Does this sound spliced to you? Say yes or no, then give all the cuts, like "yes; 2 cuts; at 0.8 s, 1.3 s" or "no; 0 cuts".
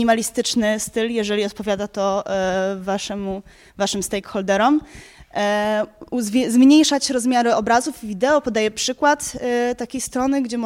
no; 0 cuts